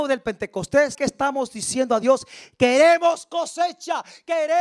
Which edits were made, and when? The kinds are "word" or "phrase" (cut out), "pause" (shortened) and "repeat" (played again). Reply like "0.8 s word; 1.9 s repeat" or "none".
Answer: 0.9 s word